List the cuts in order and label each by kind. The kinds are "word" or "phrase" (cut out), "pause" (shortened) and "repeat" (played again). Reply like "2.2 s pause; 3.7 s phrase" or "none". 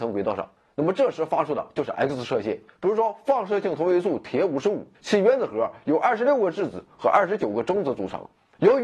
2.7 s pause; 4.9 s pause